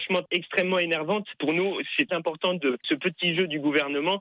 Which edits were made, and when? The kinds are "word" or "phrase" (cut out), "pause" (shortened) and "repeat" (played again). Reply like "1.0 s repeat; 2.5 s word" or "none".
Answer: 2.1 s word; 2.8 s word